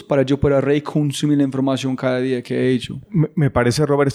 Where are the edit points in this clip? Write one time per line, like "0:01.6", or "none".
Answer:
none